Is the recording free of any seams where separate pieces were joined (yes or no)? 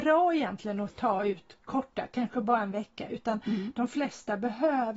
yes